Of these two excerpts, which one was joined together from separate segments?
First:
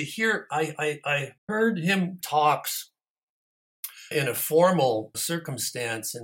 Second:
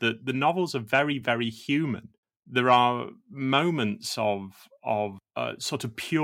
first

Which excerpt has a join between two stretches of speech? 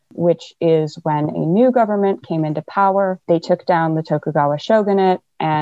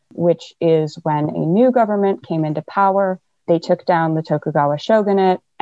first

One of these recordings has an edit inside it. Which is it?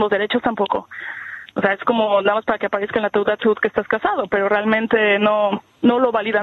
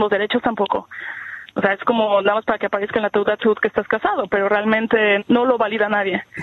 second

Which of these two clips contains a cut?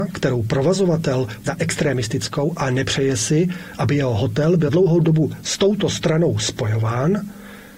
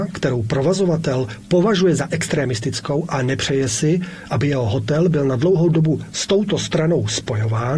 first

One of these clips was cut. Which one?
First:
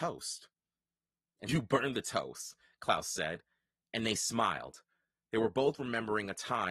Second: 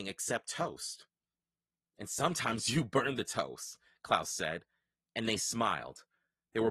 first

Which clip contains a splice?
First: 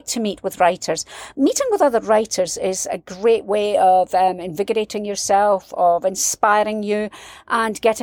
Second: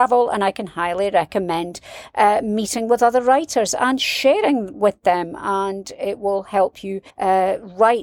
second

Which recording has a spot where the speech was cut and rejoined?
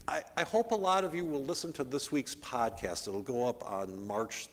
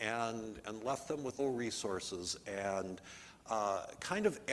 second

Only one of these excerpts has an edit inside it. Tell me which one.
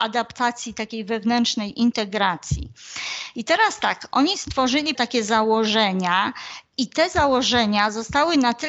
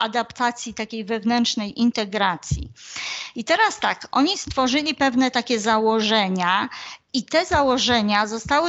first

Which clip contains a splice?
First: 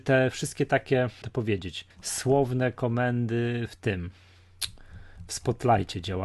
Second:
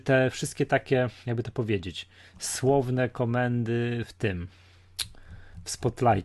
first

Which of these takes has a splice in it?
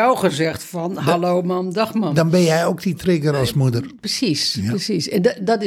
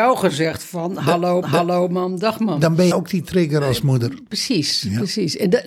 second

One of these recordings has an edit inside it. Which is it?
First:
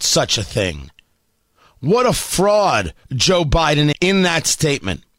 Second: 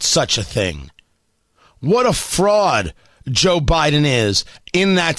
first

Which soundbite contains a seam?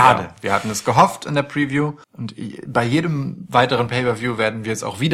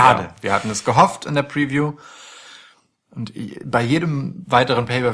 first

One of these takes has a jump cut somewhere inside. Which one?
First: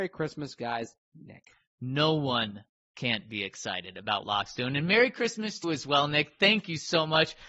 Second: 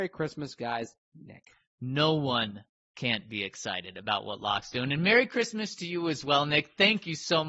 first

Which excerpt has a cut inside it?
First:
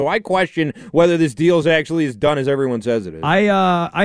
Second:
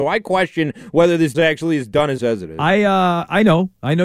second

